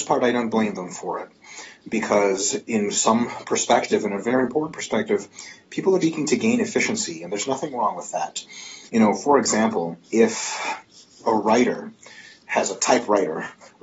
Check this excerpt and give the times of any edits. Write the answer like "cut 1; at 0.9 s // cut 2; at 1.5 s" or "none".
cut 1; at 6.0 s // cut 2; at 8.9 s // cut 3; at 10.0 s